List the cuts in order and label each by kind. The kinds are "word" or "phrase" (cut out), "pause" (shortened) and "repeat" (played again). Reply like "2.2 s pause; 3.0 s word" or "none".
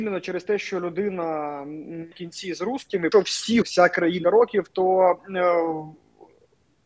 2.1 s word; 3.1 s phrase; 3.6 s word; 4.2 s phrase